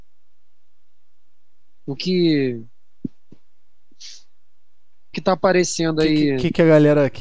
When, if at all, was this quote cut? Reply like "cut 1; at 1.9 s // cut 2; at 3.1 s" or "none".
cut 1; at 2.0 s // cut 2; at 5.1 s